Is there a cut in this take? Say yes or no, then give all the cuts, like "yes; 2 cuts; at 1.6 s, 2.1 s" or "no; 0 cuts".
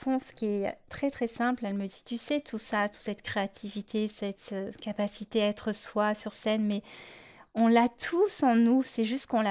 no; 0 cuts